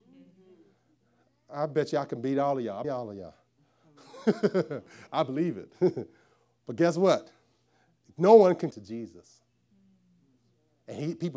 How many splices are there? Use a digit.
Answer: 2